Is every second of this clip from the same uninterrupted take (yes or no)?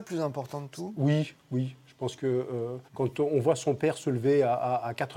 no